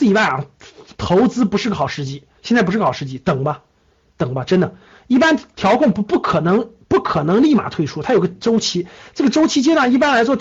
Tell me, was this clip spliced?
no; 0 cuts

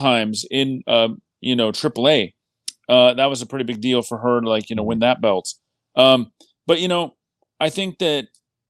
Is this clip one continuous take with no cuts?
yes; 0 cuts

